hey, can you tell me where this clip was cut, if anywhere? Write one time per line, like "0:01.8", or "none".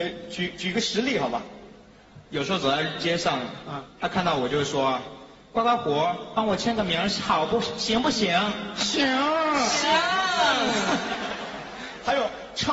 0:02.2